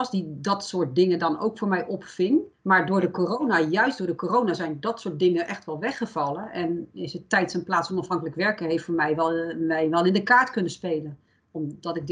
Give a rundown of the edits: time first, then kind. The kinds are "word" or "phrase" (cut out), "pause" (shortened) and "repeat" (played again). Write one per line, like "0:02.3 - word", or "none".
0:02.5 - pause